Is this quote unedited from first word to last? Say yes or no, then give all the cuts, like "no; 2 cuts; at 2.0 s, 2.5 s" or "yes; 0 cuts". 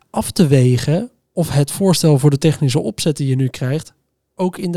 yes; 0 cuts